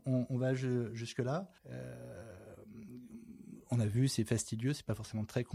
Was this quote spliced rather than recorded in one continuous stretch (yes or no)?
yes